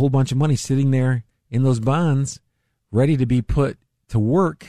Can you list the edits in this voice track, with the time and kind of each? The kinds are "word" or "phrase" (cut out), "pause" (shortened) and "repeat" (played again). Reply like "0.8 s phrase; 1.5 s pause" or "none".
none